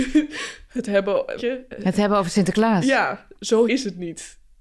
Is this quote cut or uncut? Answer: cut